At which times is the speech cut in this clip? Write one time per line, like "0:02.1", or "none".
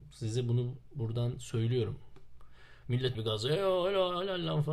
0:03.1